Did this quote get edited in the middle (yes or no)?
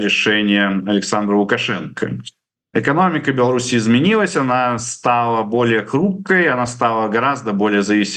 no